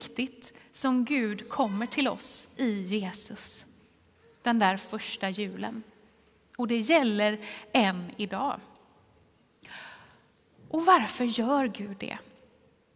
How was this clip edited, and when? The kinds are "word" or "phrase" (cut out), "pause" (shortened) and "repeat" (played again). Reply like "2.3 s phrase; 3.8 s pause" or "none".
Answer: none